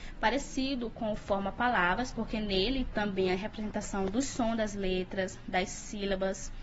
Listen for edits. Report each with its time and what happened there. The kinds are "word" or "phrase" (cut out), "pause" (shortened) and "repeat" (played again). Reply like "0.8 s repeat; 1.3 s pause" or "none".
2.9 s word